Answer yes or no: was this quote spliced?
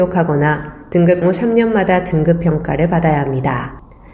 yes